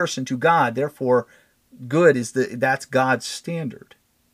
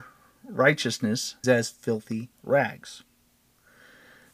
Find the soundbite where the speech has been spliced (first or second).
second